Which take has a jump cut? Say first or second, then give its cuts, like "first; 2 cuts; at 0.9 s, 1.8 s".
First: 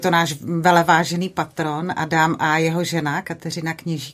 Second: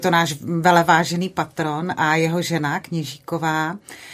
second; 2 cuts; at 2.0 s, 2.8 s